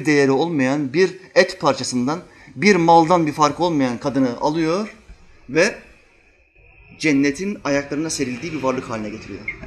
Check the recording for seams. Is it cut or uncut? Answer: uncut